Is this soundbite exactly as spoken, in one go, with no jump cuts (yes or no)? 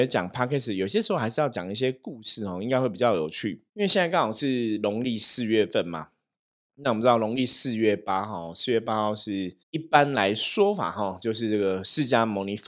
no